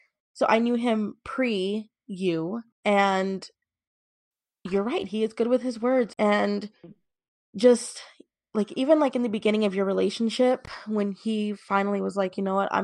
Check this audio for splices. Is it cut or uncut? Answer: cut